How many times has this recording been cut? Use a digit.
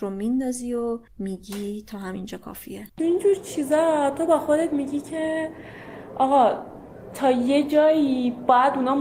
2